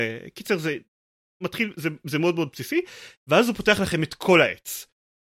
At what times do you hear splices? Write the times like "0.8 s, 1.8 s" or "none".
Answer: none